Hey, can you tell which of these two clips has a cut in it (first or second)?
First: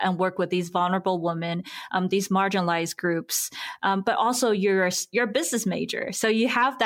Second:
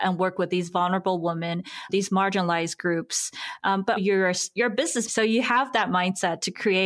second